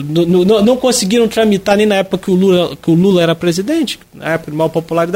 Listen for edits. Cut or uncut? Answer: cut